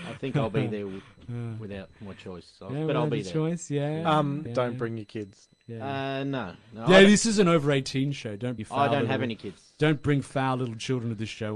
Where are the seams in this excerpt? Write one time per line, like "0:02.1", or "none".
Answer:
0:04.5
0:08.6